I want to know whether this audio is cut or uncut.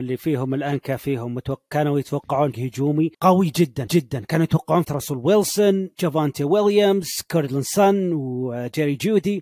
cut